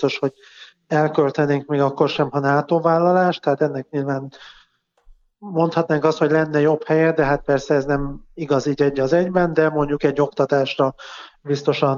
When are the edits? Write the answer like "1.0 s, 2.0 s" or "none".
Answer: none